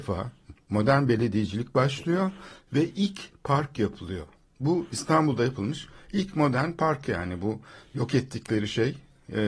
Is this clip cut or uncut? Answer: uncut